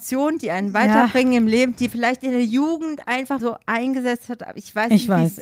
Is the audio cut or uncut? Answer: cut